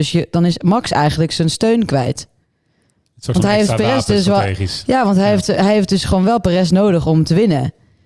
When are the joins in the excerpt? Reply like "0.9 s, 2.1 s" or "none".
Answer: none